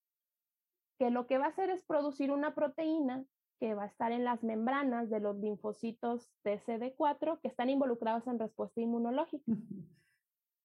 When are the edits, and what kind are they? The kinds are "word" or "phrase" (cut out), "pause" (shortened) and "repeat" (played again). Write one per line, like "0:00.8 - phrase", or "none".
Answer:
none